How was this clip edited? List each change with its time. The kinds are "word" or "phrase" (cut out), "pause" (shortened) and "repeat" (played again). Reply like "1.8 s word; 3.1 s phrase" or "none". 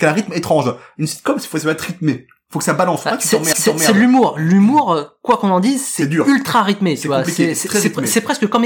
3.5 s repeat